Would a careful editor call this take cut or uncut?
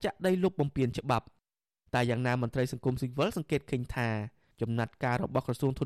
uncut